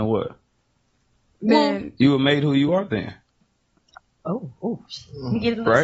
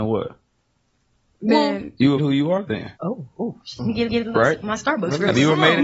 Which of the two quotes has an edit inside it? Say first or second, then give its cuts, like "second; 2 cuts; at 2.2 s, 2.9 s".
second; 4 cuts; at 2.2 s, 3.0 s, 3.8 s, 4.1 s